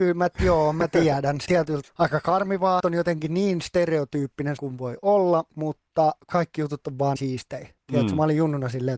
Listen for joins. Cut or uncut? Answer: cut